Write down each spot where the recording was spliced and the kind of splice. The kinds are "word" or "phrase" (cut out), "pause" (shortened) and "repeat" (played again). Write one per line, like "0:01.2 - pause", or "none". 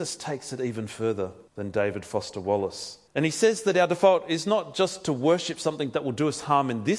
0:01.5 - pause
0:03.1 - pause